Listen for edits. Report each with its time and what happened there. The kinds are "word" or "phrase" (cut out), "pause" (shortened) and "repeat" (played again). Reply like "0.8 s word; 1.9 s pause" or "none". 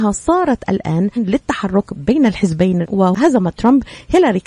1.2 s word; 2.8 s word